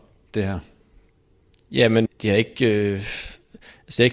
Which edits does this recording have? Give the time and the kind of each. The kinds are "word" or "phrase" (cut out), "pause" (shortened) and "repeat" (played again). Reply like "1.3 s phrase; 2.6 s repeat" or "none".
2.1 s word